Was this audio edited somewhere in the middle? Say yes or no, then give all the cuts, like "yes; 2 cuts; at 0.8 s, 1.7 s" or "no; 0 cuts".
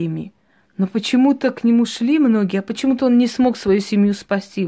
no; 0 cuts